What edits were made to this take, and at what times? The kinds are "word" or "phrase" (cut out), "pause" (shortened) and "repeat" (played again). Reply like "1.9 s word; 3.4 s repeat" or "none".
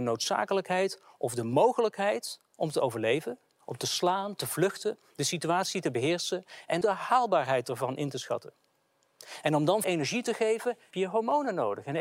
6.8 s word; 9.8 s word; 10.9 s word